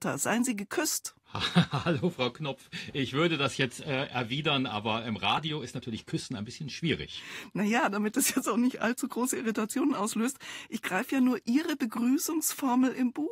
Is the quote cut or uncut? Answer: uncut